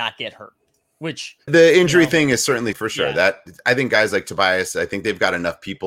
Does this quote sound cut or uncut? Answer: cut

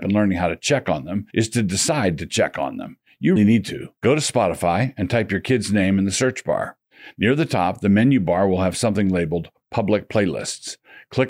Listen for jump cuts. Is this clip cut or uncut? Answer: cut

